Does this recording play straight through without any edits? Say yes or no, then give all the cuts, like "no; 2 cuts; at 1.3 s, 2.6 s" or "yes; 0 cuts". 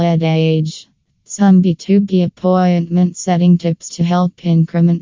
yes; 0 cuts